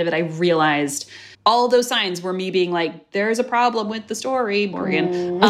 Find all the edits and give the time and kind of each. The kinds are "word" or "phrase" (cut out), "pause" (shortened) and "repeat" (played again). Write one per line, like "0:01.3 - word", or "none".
0:01.3 - pause